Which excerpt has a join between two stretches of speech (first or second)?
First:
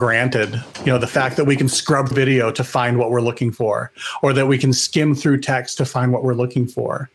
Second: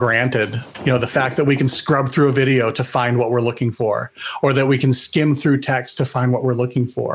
first